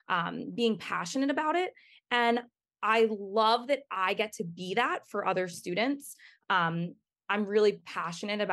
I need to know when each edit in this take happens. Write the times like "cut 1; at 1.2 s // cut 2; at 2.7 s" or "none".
none